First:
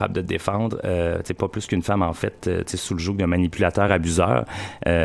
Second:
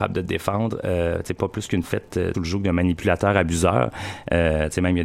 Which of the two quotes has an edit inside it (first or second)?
second